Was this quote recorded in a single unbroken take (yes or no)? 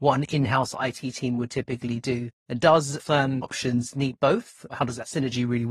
no